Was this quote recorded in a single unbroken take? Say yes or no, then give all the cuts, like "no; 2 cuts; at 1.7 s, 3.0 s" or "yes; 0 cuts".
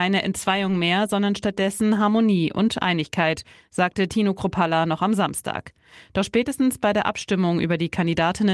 yes; 0 cuts